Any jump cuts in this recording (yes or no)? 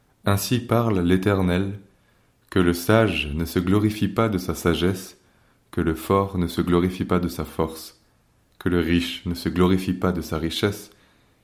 no